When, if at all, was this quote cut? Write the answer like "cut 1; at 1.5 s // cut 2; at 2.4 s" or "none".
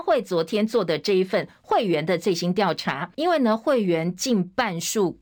cut 1; at 3.1 s